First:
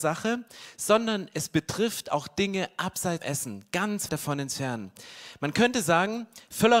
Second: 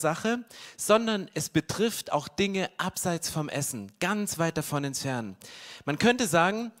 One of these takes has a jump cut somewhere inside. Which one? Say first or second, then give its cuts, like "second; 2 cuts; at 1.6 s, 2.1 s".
first; 2 cuts; at 3.2 s, 4.1 s